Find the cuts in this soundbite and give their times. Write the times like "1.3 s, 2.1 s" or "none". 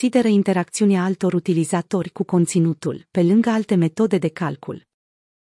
none